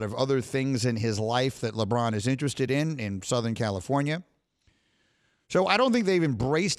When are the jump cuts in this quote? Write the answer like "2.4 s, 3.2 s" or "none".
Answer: none